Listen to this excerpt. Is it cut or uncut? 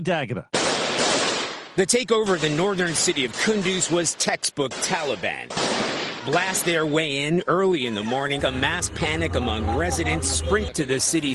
cut